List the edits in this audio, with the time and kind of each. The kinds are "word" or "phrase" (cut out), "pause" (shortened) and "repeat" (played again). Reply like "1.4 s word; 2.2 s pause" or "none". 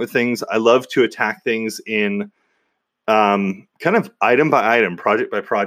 none

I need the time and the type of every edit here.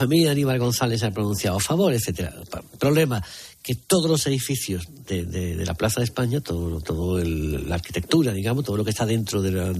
none

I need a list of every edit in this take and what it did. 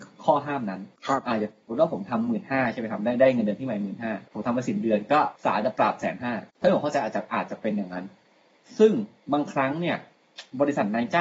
1.0 s pause; 4.3 s pause; 5.4 s pause; 6.5 s pause

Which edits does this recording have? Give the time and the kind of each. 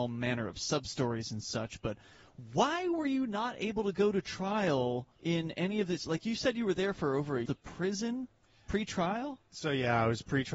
5.1 s pause; 7.5 s phrase

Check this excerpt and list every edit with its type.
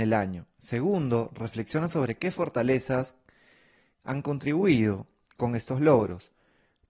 none

